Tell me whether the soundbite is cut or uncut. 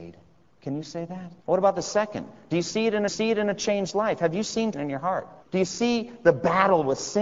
cut